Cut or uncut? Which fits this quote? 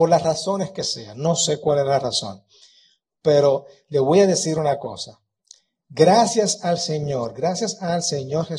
uncut